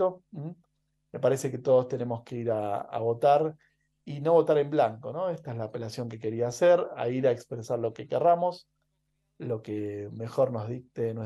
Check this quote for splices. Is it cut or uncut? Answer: uncut